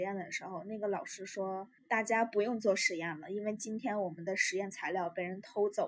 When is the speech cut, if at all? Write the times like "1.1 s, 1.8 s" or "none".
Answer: 1.8 s